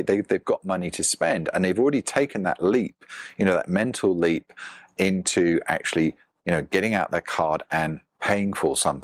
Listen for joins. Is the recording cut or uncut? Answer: uncut